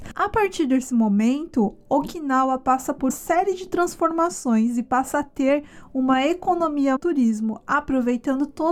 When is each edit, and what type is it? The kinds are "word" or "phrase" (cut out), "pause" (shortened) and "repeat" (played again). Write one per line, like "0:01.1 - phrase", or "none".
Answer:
0:03.1 - word
0:07.0 - phrase